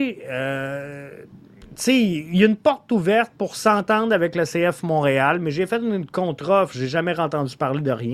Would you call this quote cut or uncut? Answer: uncut